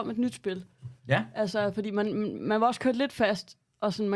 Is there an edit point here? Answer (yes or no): yes